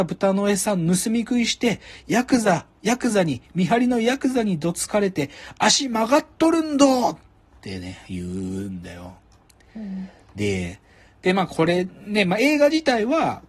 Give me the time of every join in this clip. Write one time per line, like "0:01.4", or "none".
none